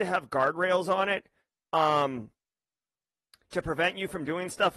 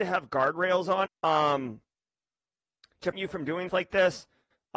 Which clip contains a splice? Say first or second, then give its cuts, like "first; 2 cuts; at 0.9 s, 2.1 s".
second; 3 cuts; at 1.1 s, 3.1 s, 3.7 s